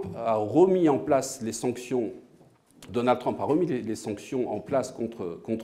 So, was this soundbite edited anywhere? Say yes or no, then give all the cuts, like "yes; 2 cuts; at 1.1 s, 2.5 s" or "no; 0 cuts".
yes; 1 cut; at 2.9 s